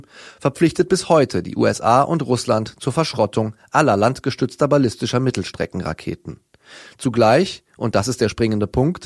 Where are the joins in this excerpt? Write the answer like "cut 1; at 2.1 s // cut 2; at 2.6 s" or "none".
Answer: none